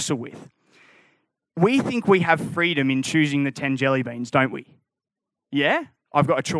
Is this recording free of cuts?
yes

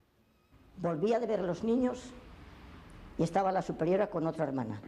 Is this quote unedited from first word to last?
yes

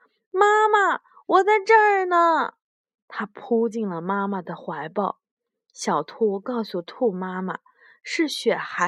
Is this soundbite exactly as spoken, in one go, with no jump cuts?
yes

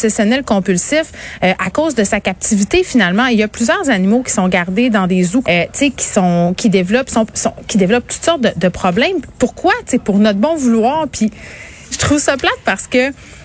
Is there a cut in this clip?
yes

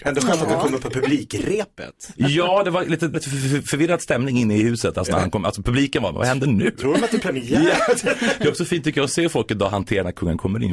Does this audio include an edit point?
yes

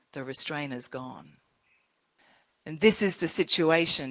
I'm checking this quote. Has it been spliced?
no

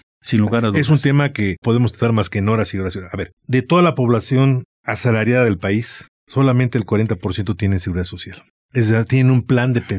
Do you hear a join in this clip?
yes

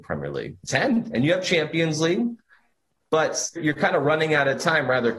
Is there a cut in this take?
yes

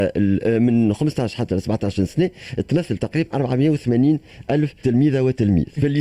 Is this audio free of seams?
yes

